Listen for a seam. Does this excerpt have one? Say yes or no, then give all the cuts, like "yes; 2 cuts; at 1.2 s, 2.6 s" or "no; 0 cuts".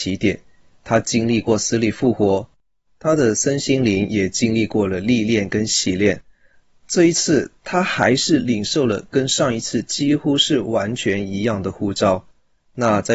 no; 0 cuts